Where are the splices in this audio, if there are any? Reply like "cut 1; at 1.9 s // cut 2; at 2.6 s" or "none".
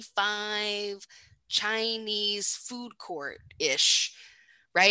none